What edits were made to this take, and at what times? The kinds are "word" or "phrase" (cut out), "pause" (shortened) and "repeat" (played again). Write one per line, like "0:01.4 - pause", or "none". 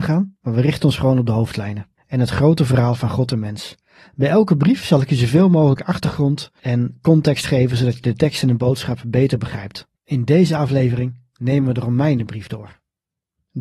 0:03.8 - pause
0:10.0 - pause